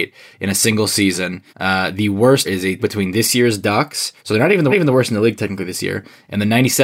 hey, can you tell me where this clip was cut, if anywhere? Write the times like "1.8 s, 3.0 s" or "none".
1.5 s, 2.4 s, 2.8 s, 4.2 s, 4.7 s